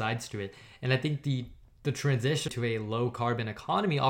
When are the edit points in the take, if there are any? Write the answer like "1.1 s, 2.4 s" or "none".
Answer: 2.5 s

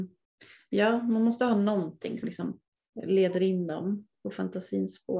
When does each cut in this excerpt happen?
2.2 s, 4.1 s

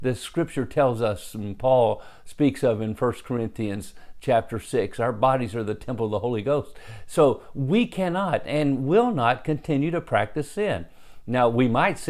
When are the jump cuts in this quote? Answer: none

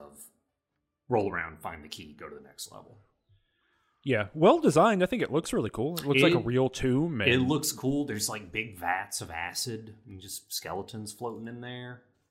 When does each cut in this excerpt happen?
none

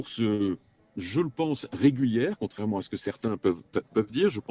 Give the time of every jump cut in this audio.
none

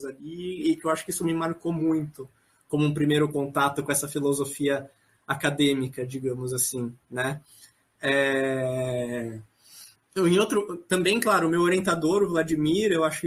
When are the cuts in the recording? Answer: 10.0 s

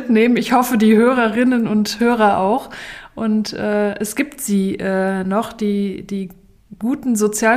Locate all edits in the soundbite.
none

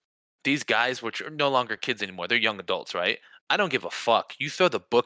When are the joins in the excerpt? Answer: none

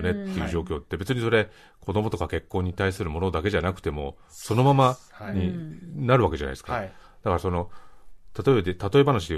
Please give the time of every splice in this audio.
none

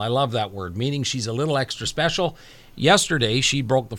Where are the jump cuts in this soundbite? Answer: none

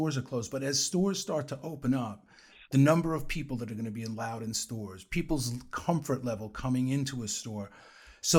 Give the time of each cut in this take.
none

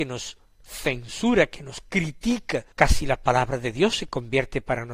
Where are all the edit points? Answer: 2.7 s

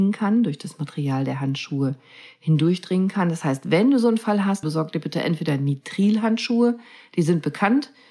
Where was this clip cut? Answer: 4.6 s

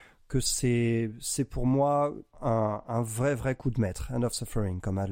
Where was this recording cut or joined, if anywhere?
2.3 s

